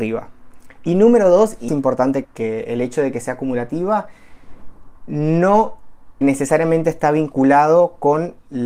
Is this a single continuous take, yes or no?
no